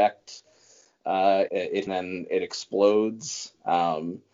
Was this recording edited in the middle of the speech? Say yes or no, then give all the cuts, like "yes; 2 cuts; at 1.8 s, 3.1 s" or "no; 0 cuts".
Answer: yes; 2 cuts; at 1.5 s, 1.9 s